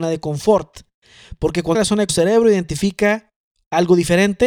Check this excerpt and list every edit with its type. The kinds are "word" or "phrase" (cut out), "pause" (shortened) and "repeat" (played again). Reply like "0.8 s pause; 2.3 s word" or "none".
1.7 s phrase; 2.1 s phrase